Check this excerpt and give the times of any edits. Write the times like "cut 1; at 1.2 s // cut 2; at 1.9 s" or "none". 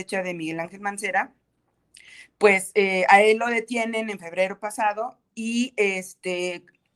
none

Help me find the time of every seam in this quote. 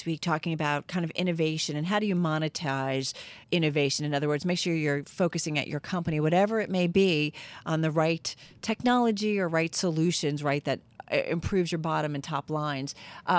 cut 1; at 3.4 s

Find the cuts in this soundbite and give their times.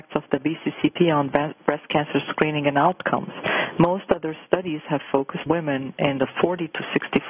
cut 1; at 5.5 s

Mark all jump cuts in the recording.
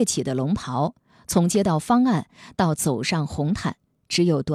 none

